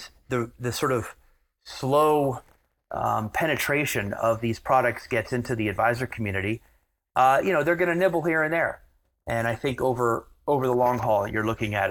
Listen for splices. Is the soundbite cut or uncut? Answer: uncut